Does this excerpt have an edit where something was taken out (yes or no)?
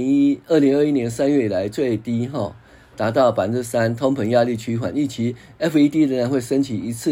no